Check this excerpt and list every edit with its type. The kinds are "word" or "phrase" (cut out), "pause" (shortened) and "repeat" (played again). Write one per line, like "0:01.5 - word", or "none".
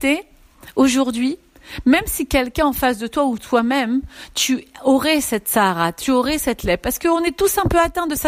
none